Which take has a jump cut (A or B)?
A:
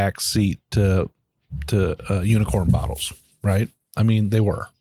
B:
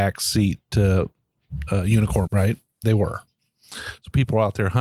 B